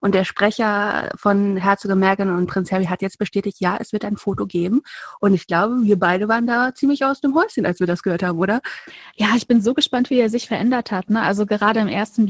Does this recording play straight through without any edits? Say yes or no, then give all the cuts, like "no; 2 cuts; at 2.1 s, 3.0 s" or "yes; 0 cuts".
yes; 0 cuts